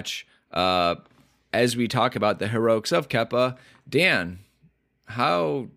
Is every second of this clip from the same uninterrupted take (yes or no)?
yes